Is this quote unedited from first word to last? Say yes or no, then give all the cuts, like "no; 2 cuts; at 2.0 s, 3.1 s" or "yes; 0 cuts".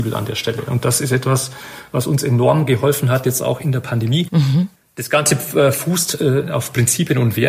yes; 0 cuts